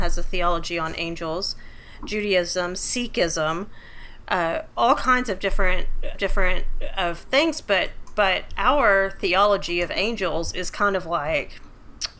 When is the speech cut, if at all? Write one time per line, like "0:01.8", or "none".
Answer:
0:06.1